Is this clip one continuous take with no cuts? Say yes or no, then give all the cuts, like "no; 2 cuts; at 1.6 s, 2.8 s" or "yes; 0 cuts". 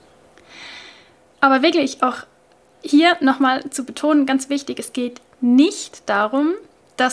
yes; 0 cuts